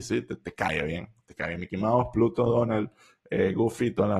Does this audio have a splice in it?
no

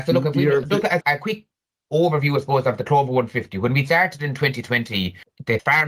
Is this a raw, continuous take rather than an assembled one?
no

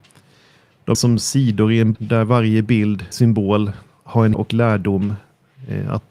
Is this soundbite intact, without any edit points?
no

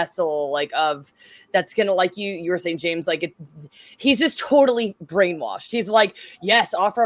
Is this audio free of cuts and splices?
yes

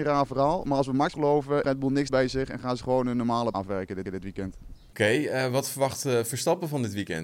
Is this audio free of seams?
no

